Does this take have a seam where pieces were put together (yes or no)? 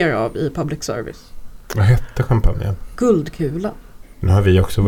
no